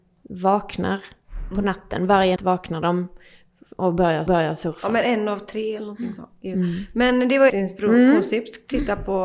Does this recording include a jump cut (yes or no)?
yes